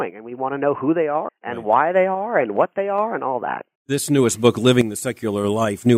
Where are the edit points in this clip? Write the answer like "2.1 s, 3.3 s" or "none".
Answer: 1.3 s, 3.8 s